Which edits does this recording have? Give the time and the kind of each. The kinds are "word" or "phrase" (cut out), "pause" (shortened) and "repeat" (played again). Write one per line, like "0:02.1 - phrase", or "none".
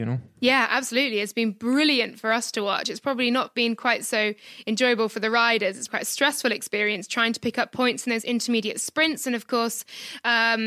0:05.9 - word